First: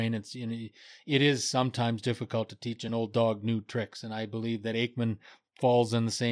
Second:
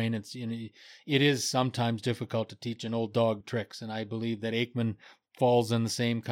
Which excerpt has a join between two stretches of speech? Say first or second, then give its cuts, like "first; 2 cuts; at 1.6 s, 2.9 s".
second; 1 cut; at 3.4 s